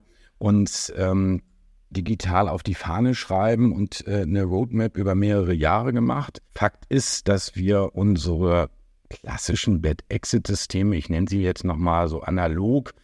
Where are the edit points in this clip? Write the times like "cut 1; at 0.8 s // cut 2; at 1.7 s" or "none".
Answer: cut 1; at 1.9 s // cut 2; at 6.5 s